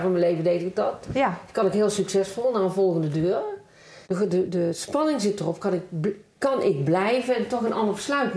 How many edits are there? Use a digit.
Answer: 2